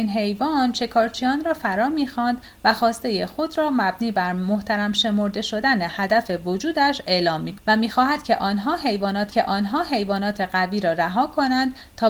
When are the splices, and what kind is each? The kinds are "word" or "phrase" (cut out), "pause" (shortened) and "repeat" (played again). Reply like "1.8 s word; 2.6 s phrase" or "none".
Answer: 7.6 s word; 9.3 s repeat